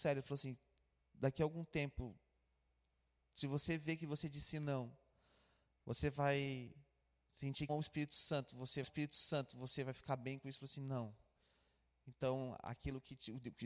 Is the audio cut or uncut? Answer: cut